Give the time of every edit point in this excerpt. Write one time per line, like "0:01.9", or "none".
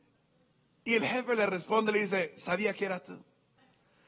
none